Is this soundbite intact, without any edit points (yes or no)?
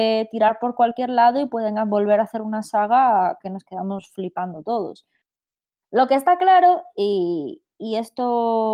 yes